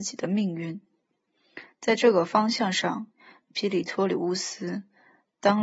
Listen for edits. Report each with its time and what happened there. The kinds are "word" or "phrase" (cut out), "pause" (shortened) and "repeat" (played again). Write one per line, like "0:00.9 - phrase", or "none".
none